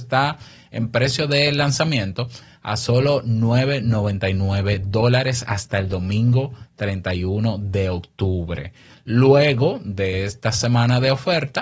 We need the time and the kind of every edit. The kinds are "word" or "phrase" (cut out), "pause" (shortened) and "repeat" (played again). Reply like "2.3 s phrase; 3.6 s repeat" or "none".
none

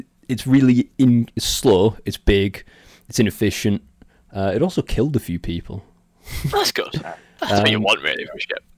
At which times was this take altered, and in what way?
none

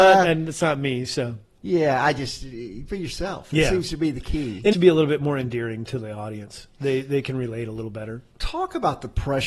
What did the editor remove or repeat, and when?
2.9 s word; 4.7 s phrase

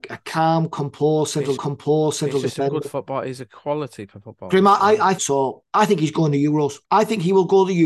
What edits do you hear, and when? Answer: 1.6 s repeat; 5.2 s word; 5.7 s pause; 6.8 s pause

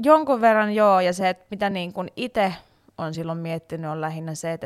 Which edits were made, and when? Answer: none

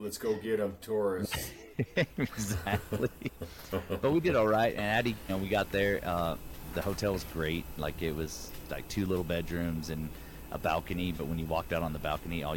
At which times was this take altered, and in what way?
5.3 s word; 8.7 s phrase

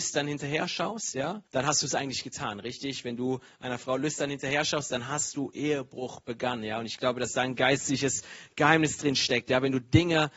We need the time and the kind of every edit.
1.5 s pause

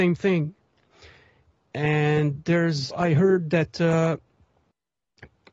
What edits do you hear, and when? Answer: 2.9 s word

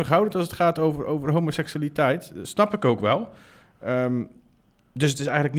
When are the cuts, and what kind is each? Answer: none

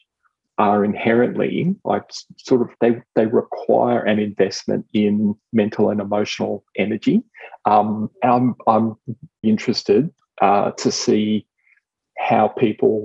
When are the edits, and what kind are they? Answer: 2.8 s word; 9.4 s word

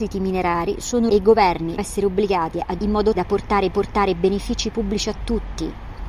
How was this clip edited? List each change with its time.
1.1 s phrase; 1.8 s word; 2.8 s word; 3.2 s word; 3.7 s repeat

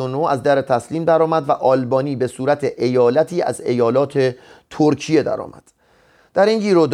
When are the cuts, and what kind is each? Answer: none

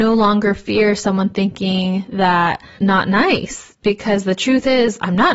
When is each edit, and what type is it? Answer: 2.8 s word

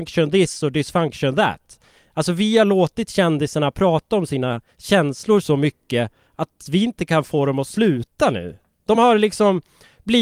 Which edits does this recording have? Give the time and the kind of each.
none

